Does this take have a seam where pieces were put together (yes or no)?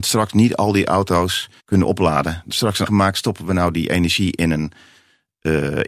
yes